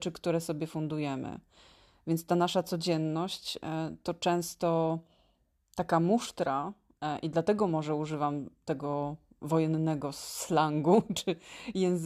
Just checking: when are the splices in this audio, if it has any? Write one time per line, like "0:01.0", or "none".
none

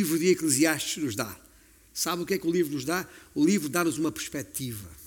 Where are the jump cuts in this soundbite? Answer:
none

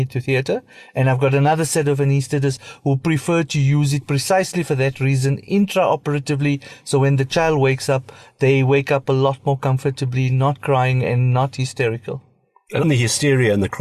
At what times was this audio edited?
0:12.8

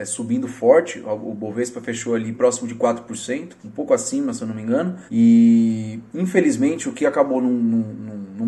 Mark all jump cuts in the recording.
0:02.3
0:03.6
0:05.1

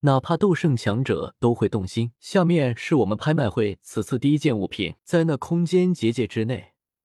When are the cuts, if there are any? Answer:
0:02.1
0:05.0

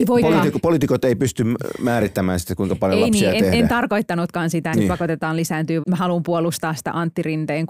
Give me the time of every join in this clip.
0:04.7
0:05.8

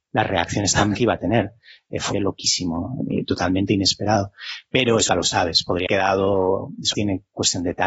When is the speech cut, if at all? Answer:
0:00.9
0:02.1
0:03.0
0:05.1
0:05.9
0:06.9

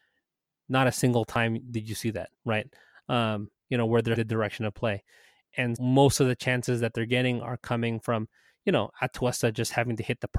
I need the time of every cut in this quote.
0:02.3
0:04.2
0:05.8

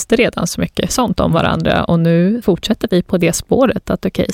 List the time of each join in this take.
0:02.4

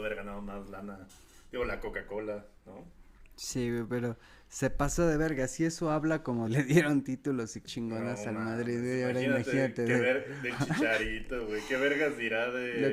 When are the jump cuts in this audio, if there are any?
0:06.5
0:07.6

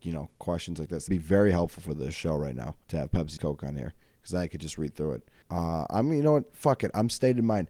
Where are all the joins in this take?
0:01.1
0:02.8
0:03.4
0:05.4

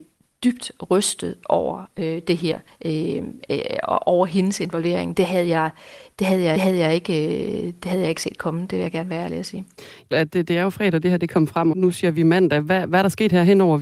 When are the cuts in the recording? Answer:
0:02.7
0:06.5
0:10.1
0:11.7

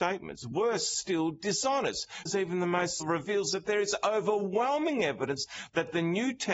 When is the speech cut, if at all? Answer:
0:02.3
0:03.0

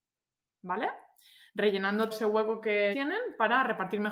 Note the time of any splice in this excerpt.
0:02.1
0:02.9

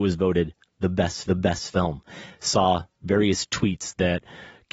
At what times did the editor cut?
0:01.3

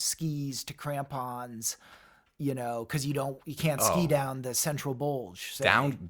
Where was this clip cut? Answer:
none

